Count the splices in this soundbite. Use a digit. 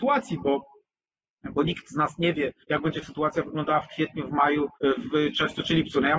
2